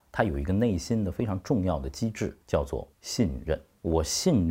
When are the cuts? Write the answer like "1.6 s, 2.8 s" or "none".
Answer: 2.4 s

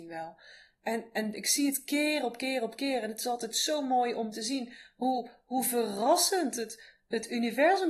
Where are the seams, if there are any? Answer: none

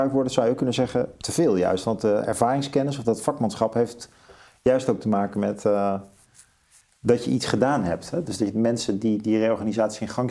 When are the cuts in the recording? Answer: none

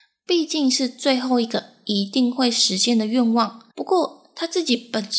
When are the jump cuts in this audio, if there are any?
3.7 s

